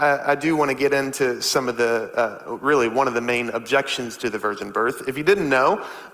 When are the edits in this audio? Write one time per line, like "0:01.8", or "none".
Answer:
none